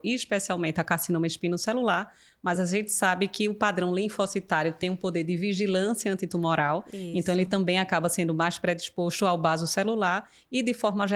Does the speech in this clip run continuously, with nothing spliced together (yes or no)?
yes